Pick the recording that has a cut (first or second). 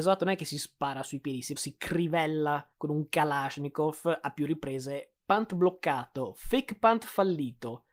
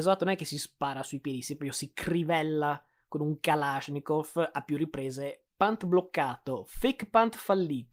first